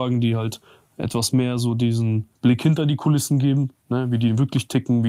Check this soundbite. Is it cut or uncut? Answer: cut